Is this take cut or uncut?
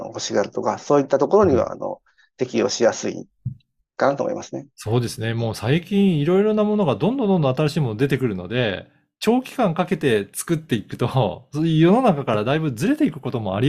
uncut